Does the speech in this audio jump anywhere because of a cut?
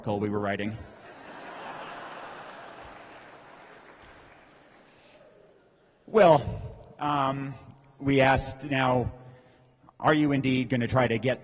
no; 0 cuts

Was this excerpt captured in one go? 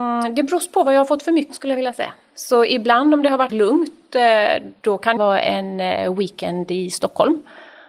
no; 3 cuts; at 1.5 s, 3.5 s, 5.2 s

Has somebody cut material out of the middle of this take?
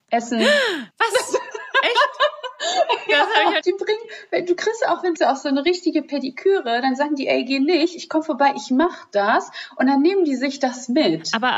yes; 3 cuts; at 0.9 s, 3.6 s, 5.2 s

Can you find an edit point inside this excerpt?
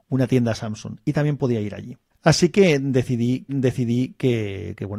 yes; 2 cuts; at 2.1 s, 3.5 s

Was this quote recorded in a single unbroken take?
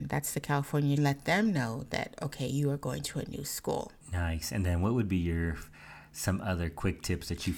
no; 2 cuts; at 1.0 s, 4.0 s

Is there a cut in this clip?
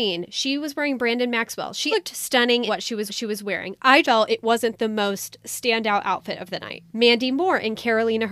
yes; 5 cuts; at 1.9 s, 2.7 s, 3.1 s, 4.0 s, 6.9 s

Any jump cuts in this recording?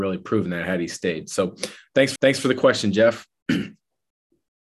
yes; 1 cut; at 2.2 s

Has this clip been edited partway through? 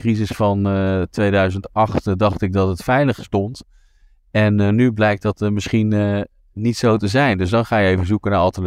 no; 0 cuts

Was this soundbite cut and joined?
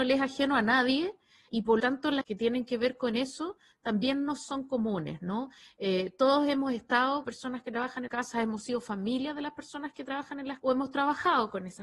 yes; 6 cuts; at 1.5 s, 1.8 s, 2.2 s, 7.2 s, 8.1 s, 10.6 s

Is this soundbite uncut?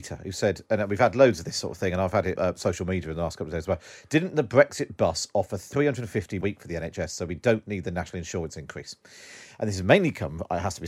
no; 2 cuts; at 2.3 s, 6.4 s

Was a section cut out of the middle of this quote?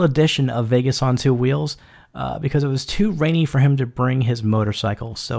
no; 0 cuts

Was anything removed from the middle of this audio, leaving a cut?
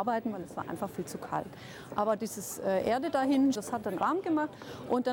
yes; 2 cuts; at 3.6 s, 4.0 s

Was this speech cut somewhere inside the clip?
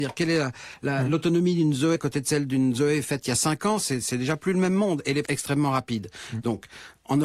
yes; 2 cuts; at 2.0 s, 5.3 s

